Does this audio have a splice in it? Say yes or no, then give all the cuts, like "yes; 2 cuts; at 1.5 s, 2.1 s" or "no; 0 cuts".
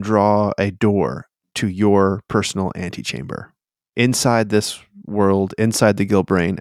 no; 0 cuts